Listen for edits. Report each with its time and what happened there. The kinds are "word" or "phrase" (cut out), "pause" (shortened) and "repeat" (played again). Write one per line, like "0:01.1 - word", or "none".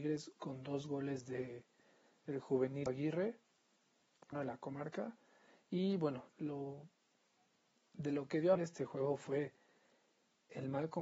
0:02.9 - word
0:04.3 - word
0:06.3 - word
0:08.5 - word